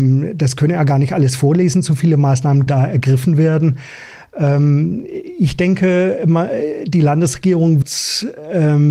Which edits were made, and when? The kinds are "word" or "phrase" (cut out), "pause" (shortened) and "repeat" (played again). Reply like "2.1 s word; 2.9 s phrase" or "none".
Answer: 2.7 s word; 7.8 s word